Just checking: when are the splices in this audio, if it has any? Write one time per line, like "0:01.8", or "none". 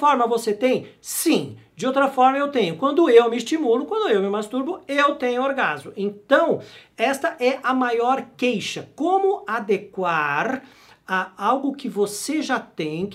none